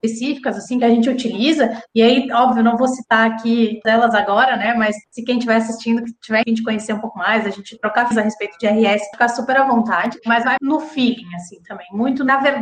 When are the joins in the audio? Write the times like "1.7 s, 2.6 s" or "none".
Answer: 3.8 s, 5.0 s, 6.4 s, 8.1 s, 9.1 s, 10.6 s